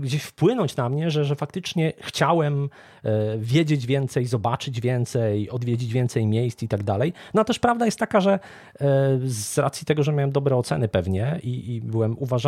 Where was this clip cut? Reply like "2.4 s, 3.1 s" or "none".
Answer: none